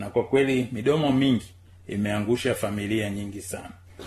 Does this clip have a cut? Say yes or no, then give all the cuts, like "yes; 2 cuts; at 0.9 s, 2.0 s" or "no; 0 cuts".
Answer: no; 0 cuts